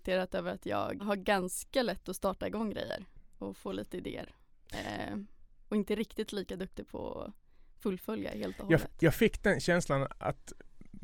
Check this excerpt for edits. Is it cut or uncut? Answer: cut